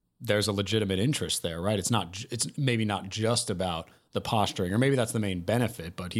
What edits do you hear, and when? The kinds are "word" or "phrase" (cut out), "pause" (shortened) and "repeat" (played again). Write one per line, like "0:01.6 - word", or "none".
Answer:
none